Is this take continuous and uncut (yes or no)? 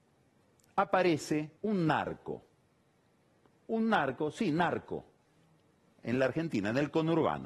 no